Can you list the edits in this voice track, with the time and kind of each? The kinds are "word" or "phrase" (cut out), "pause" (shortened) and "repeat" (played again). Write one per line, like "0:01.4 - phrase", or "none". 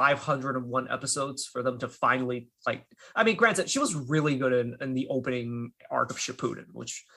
none

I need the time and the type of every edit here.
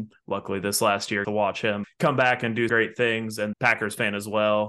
0:01.2 - word
0:01.8 - word
0:02.7 - word
0:03.5 - word

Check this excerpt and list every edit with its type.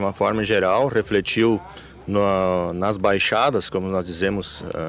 none

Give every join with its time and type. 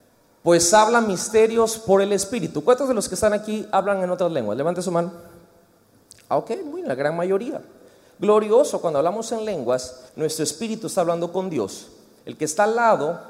0:10.1 - pause

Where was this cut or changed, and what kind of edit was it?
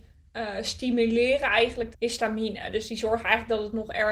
0:01.9 - phrase

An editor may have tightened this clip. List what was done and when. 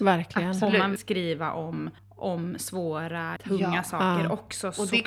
0:01.0 - word
0:02.0 - pause
0:03.4 - word

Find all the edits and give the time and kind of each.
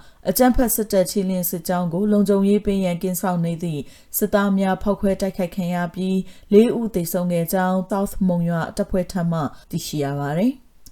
0:07.9 - word
0:09.6 - pause

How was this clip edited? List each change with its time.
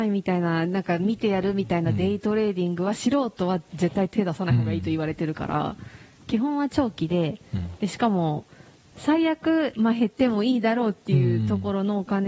none

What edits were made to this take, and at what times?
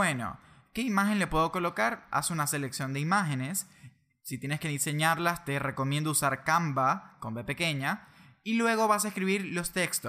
none

